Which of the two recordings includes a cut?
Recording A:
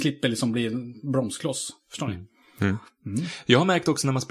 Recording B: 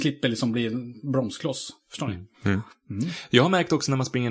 B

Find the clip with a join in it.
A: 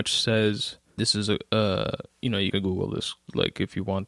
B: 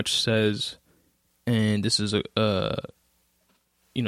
A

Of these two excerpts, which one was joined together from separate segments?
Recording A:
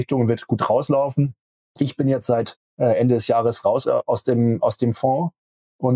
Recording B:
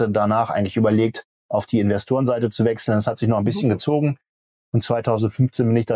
A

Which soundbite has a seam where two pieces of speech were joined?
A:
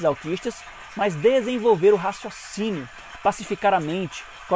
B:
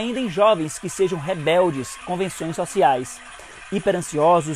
B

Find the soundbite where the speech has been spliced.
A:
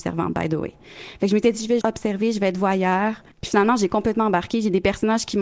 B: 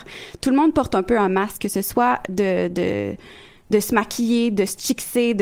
A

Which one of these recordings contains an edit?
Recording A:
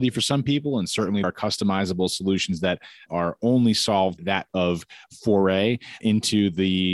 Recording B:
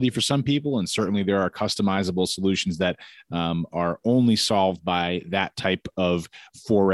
A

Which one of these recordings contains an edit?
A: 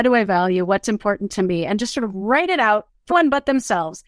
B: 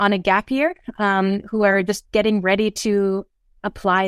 A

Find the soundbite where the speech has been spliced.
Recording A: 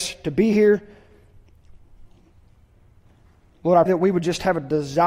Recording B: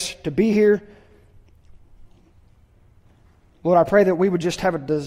A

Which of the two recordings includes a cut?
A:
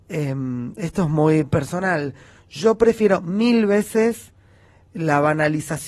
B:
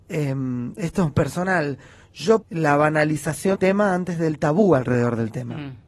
B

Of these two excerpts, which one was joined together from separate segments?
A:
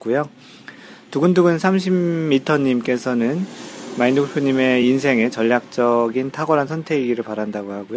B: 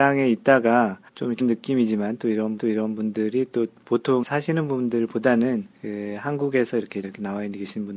B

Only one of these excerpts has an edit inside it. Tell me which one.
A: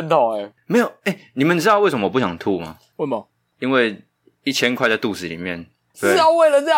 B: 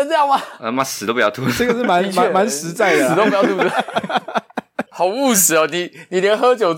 B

